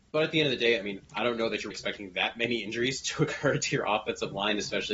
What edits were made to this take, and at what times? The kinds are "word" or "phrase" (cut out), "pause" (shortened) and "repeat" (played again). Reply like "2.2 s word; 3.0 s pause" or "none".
1.7 s word